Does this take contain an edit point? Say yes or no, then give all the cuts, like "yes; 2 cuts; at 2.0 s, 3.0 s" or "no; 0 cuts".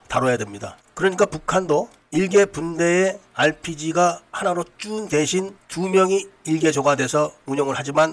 no; 0 cuts